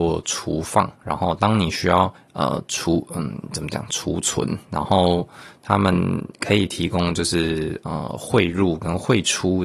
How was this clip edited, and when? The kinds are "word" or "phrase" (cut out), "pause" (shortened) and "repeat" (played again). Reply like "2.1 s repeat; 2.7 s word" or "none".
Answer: 2.2 s pause